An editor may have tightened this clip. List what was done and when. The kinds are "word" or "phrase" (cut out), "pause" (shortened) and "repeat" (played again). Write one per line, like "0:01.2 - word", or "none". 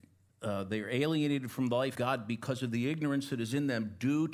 0:01.9 - word

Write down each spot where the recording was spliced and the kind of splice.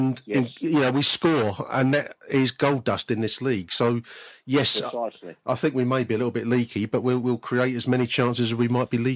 none

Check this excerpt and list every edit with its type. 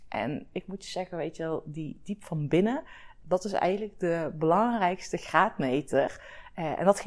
0:03.2 - word

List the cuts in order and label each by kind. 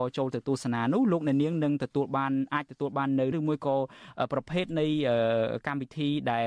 0:03.3 - word

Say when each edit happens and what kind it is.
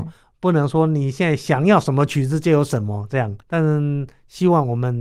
0:03.4 - pause

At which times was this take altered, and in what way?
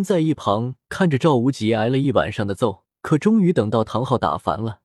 0:02.9 - pause

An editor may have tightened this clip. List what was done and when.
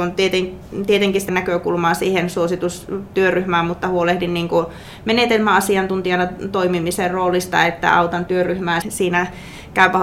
0:01.3 - word
0:08.8 - word

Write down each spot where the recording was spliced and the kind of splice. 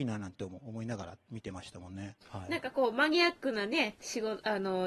0:02.2 - pause

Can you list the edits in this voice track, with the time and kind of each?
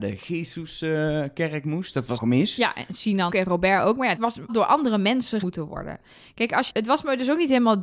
0:02.2 - word
0:03.3 - word
0:04.2 - word
0:04.5 - word
0:05.4 - word
0:06.7 - word

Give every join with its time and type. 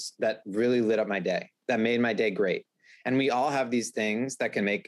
none

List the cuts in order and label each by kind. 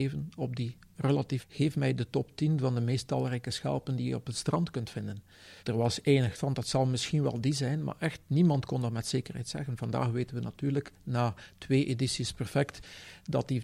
0:01.4 - phrase
0:05.6 - pause
0:06.3 - word

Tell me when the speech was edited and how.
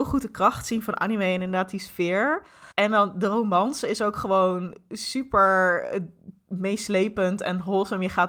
0:02.7 - pause

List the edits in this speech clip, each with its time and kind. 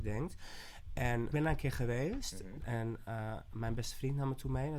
0:01.3 - phrase

